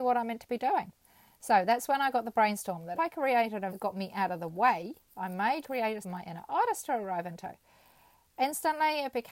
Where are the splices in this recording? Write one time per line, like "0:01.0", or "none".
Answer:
0:03.0
0:03.7
0:05.6
0:06.0